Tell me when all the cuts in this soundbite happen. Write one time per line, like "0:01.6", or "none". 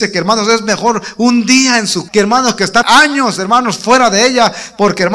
0:02.1
0:02.8